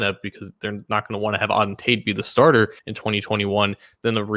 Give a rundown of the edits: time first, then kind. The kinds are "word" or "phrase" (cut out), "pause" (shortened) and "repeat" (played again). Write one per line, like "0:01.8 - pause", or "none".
0:02.8 - pause